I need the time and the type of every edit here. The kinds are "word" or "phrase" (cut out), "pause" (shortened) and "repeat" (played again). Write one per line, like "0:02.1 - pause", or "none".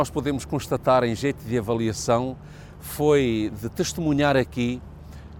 none